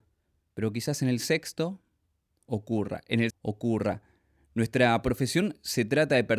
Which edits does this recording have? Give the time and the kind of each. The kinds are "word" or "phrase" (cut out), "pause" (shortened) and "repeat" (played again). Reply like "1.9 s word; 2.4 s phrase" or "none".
3.3 s word